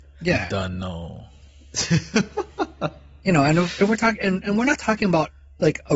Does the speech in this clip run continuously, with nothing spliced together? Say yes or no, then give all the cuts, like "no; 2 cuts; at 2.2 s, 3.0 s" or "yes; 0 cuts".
yes; 0 cuts